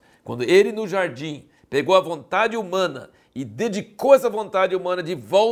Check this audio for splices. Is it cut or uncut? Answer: uncut